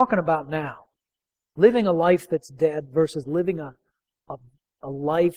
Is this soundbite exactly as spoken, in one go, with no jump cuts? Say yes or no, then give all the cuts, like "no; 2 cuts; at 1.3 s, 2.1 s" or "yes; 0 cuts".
yes; 0 cuts